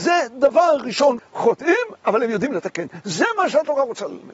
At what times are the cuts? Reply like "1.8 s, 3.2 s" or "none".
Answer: 1.2 s